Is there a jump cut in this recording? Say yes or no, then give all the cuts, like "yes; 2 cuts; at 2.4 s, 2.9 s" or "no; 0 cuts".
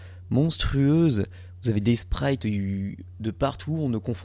no; 0 cuts